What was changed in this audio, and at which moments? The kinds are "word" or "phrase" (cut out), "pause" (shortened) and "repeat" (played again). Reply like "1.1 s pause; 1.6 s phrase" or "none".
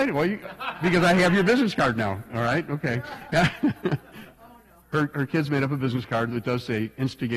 none